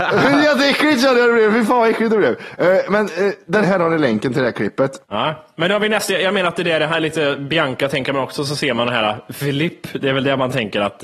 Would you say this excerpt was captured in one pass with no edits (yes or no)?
no